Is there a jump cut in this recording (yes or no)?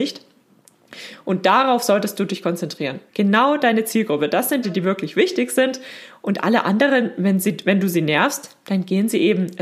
yes